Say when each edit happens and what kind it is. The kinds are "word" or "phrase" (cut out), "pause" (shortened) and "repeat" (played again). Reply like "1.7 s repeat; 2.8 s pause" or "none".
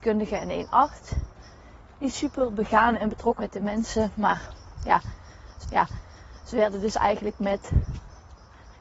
3.4 s word; 5.6 s repeat